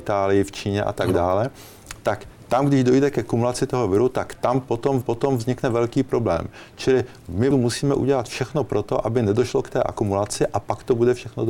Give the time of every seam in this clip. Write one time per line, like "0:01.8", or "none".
0:05.0
0:07.5

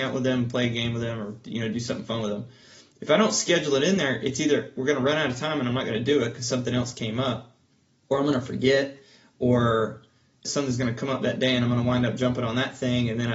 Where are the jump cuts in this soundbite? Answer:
none

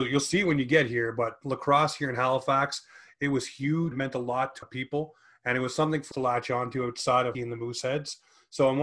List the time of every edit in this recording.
0:03.9
0:04.6
0:06.1
0:07.3

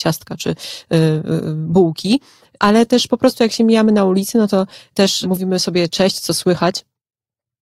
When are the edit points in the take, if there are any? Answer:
none

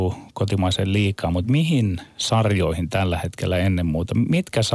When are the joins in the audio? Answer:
none

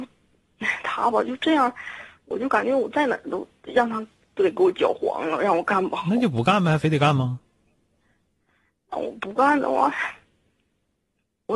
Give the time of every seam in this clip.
none

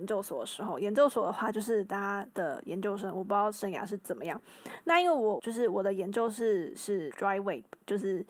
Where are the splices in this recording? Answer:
0:07.1

